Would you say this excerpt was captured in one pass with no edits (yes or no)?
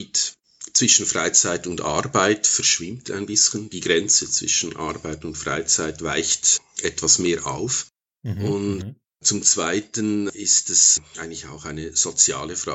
yes